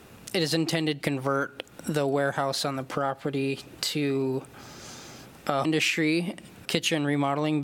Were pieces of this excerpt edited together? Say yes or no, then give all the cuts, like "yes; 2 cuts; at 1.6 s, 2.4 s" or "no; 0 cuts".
yes; 3 cuts; at 1.0 s, 5.6 s, 6.6 s